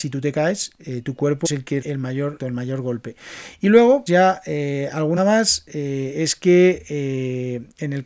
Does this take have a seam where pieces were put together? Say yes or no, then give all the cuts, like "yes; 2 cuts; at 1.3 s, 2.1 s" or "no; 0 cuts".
yes; 5 cuts; at 1.4 s, 1.8 s, 2.4 s, 4.1 s, 5.2 s